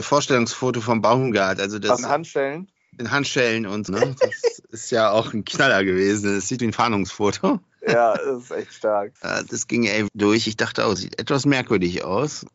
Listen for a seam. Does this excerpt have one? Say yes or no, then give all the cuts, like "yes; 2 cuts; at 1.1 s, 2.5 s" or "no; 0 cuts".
yes; 6 cuts; at 2.0 s, 3.9 s, 6.6 s, 9.2 s, 10.1 s, 11.0 s